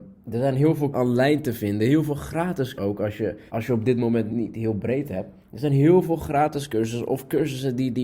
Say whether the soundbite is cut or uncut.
cut